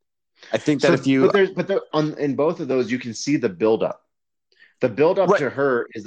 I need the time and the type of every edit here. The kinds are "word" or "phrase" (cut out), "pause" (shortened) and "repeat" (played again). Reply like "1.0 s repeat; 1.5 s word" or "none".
1.9 s word